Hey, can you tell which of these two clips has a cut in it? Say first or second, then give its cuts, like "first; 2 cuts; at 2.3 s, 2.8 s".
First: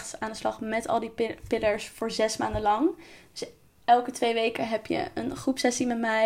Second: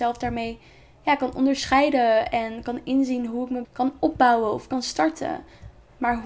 second; 1 cut; at 3.6 s